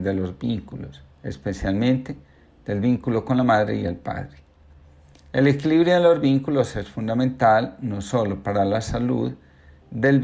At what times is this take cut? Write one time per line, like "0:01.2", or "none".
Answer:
0:01.1